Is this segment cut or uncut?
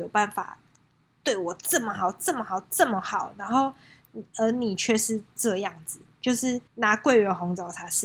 cut